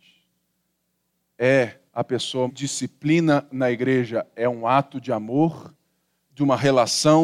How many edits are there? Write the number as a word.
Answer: two